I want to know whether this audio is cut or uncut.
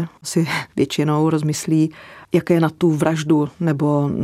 uncut